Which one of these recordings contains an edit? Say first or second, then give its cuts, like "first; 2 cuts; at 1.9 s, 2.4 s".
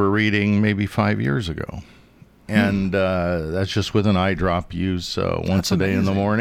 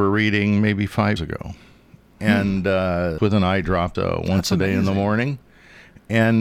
second; 3 cuts; at 1.2 s, 3.2 s, 3.9 s